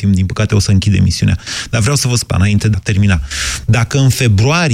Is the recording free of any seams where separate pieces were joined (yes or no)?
no